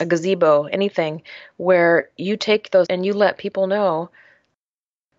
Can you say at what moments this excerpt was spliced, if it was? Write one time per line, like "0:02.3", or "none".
0:02.9